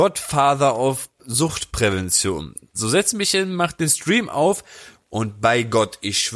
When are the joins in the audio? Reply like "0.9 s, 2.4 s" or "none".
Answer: none